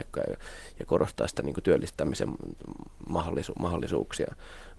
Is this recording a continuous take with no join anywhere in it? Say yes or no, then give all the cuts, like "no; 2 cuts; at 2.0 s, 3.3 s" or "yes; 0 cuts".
yes; 0 cuts